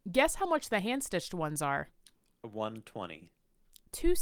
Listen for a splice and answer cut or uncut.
uncut